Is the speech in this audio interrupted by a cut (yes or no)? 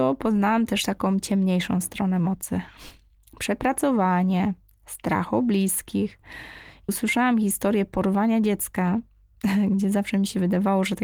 yes